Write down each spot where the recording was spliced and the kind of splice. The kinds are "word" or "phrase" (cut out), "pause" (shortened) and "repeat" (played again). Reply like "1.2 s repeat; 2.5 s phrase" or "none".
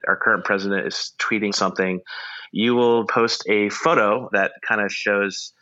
1.5 s word; 3.1 s word; 4.3 s word